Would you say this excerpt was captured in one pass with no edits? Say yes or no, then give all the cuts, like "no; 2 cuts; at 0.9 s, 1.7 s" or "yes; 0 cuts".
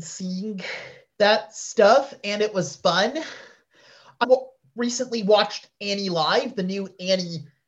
no; 1 cut; at 4.2 s